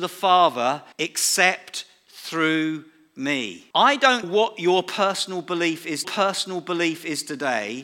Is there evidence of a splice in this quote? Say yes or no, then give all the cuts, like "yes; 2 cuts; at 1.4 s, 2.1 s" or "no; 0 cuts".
yes; 4 cuts; at 0.9 s, 3.7 s, 4.2 s, 6.0 s